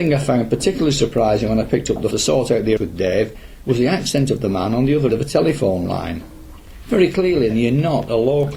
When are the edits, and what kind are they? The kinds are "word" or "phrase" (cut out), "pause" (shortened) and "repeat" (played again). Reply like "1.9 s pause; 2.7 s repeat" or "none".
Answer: 2.1 s word; 2.8 s word; 5.1 s word; 7.5 s word